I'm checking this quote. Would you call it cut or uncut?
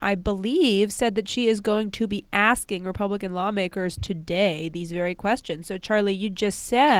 uncut